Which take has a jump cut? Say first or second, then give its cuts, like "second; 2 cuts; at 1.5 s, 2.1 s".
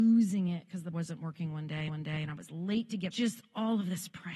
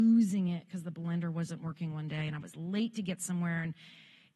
first; 3 cuts; at 0.9 s, 1.9 s, 3.1 s